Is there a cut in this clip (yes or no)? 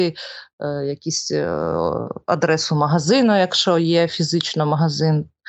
yes